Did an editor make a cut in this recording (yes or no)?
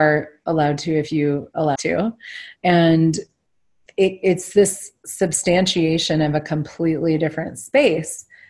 yes